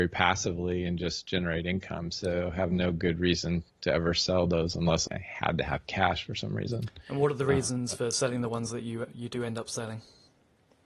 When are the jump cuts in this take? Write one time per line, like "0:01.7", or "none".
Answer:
0:03.7
0:05.1